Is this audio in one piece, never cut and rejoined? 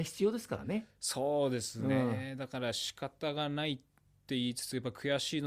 yes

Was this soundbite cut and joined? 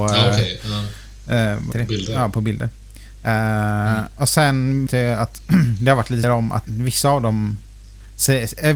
yes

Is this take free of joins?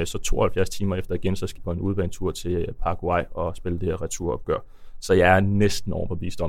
no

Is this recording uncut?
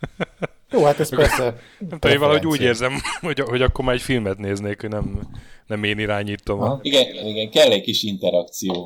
no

